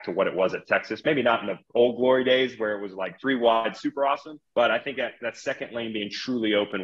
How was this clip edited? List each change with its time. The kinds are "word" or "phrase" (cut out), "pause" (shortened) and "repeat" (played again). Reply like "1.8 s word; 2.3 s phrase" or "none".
4.5 s pause